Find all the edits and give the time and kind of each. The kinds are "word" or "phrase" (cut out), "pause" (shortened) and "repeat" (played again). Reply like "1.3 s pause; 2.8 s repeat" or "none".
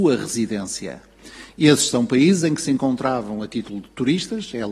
none